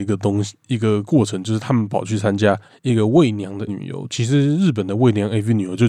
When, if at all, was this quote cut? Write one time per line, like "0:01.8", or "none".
0:02.7
0:03.7
0:04.1